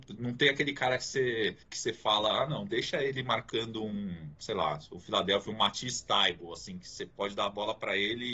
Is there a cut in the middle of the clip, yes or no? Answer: yes